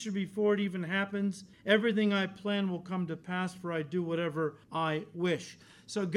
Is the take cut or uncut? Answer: cut